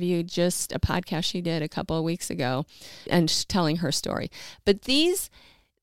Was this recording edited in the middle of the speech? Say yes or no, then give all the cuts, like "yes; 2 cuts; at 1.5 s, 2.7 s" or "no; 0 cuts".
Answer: yes; 1 cut; at 3.1 s